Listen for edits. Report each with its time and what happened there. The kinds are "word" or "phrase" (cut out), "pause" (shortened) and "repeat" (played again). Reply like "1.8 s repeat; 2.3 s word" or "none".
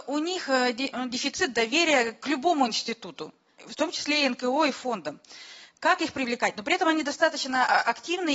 none